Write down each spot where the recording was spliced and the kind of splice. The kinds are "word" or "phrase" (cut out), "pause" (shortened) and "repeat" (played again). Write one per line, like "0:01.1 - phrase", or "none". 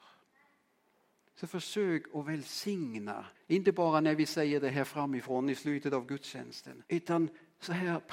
0:03.3 - pause
0:06.9 - pause